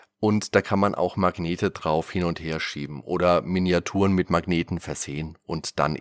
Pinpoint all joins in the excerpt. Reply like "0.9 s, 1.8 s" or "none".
none